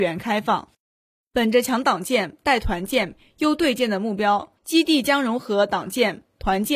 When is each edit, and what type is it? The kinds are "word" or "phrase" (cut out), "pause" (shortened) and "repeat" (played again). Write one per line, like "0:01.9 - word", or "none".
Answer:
0:04.6 - pause